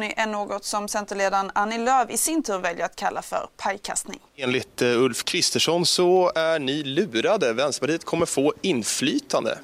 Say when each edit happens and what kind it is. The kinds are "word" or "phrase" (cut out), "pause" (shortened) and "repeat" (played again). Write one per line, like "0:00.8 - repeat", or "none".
0:04.3 - pause

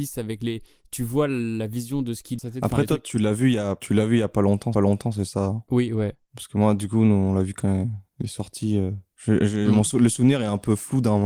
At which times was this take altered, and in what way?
0:02.4 - phrase
0:04.7 - repeat
0:08.1 - pause
0:09.1 - pause

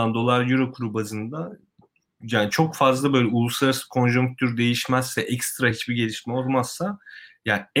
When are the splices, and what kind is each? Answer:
none

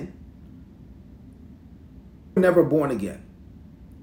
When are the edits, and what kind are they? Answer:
0:02.4 - phrase

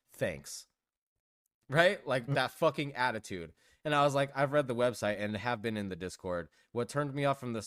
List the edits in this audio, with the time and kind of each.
none

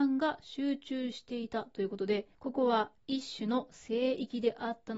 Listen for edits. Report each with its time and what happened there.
0:02.3 - pause
0:03.0 - pause

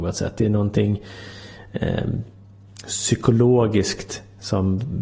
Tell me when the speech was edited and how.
none

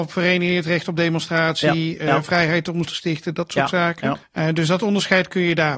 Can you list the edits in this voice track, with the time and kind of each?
0:02.8 - word
0:04.2 - pause

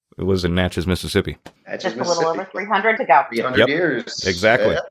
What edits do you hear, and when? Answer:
0:01.6 - pause
0:03.0 - word

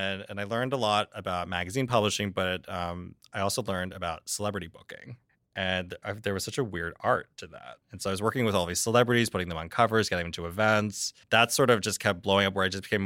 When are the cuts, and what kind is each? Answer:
0:05.3 - pause
0:07.8 - pause
0:11.2 - pause

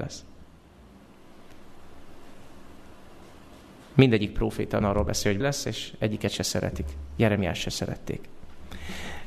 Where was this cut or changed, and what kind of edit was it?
0:04.8 - word
0:05.4 - word

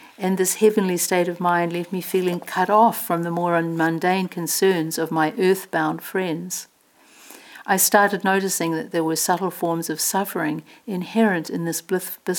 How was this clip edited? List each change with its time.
none

